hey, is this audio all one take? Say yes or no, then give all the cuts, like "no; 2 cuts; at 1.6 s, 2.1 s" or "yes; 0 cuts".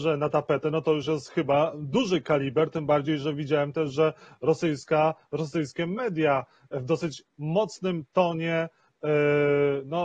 yes; 0 cuts